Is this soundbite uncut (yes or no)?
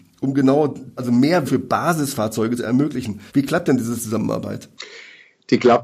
no